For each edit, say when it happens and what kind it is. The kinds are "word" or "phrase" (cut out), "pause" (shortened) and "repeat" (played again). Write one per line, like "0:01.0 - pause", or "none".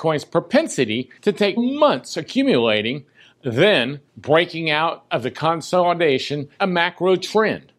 0:01.2 - pause
0:01.6 - word
0:04.1 - pause
0:06.6 - phrase

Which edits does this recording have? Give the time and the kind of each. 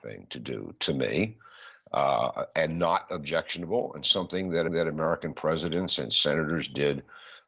0:04.7 - repeat

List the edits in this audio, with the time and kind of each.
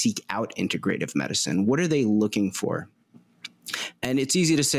none

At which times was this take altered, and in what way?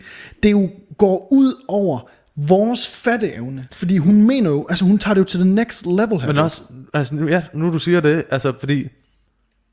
none

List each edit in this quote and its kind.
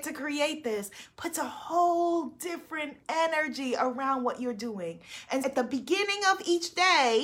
0:05.4 - word

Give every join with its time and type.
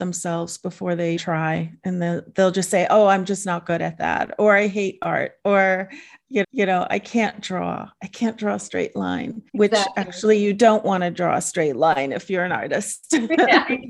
0:01.2 - word
0:06.4 - repeat
0:09.5 - pause

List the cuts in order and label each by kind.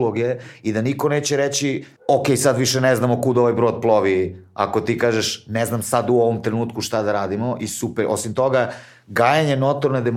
0:02.0 - pause

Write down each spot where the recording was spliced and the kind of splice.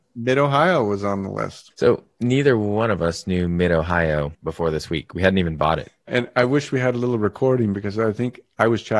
none

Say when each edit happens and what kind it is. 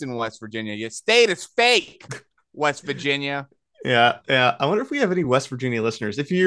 none

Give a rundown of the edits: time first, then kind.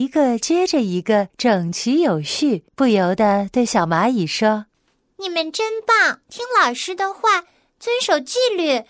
0:01.3 - pause
0:02.7 - pause
0:04.7 - pause
0:06.2 - pause

